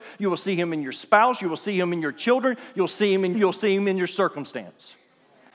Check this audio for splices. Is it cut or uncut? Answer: cut